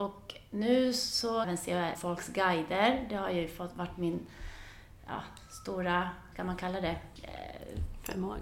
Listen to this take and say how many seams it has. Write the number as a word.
three